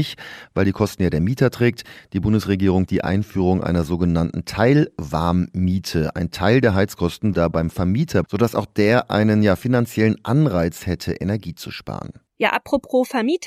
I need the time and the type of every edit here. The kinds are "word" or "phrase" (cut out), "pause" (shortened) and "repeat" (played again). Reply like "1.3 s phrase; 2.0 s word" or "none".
2.9 s word; 7.3 s word; 8.2 s word